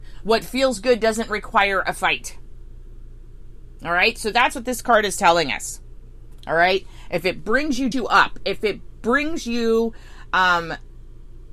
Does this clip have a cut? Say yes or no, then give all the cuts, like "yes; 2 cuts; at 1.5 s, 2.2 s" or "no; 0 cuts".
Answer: yes; 1 cut; at 7.9 s